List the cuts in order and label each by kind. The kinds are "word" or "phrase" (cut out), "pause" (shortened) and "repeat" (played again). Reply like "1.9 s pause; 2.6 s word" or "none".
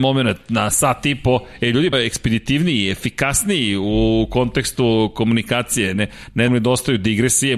1.9 s word; 6.5 s phrase